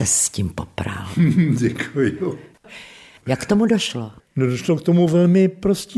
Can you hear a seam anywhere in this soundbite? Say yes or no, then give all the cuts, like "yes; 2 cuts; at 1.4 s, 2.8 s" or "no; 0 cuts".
no; 0 cuts